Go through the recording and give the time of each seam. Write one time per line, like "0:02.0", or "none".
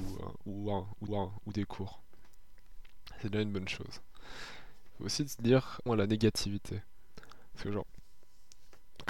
0:01.1
0:05.9